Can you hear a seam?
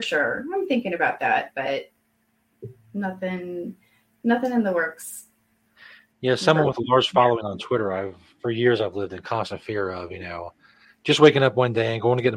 no; 0 cuts

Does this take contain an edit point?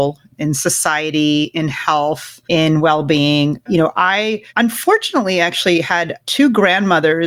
yes; 3 cuts; at 2.4 s, 4.5 s, 6.2 s

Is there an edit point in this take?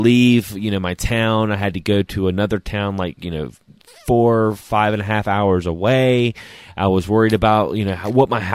no; 0 cuts

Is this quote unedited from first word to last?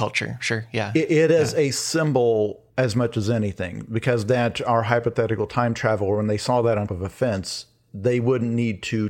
no; 2 cuts; at 2.7 s, 6.9 s

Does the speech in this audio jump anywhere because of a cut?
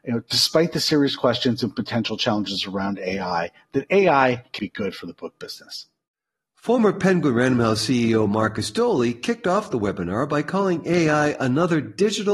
yes; 1 cut; at 4.6 s

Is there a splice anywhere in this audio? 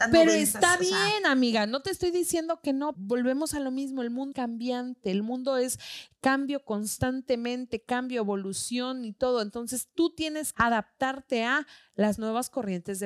yes; 3 cuts; at 2.9 s, 4.3 s, 10.5 s

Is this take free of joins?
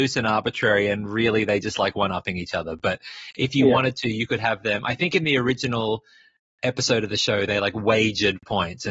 yes; 0 cuts

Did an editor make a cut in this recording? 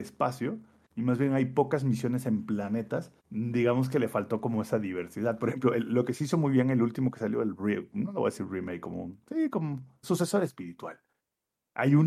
yes; 2 cuts; at 3.2 s, 10.0 s

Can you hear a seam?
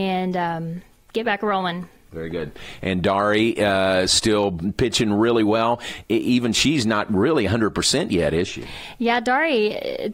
yes; 1 cut; at 0.9 s

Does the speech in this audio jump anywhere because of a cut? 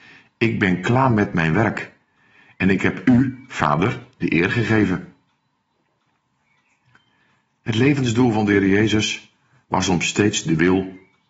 no; 0 cuts

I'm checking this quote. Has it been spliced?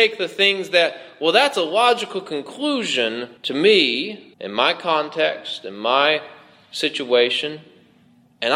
yes; 2 cuts; at 3.4 s, 4.3 s

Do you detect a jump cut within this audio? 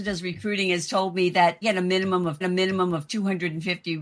yes; 2 cuts; at 1.6 s, 2.4 s

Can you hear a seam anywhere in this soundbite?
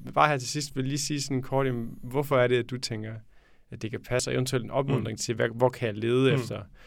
no; 0 cuts

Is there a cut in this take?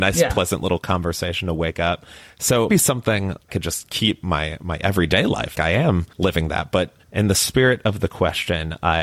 yes; 5 cuts; at 2.7 s, 3.5 s, 5.5 s, 6.1 s, 7.0 s

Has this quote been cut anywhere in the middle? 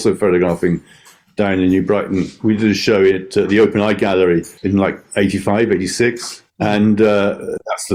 yes; 2 cuts; at 4.6 s, 6.5 s

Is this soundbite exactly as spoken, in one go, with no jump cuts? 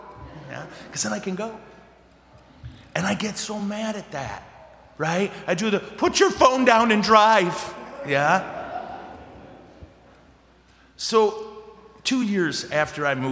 yes; 0 cuts

